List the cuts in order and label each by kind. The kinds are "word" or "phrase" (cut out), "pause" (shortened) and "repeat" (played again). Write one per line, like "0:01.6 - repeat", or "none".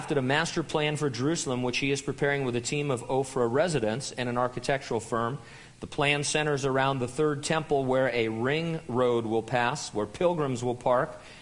none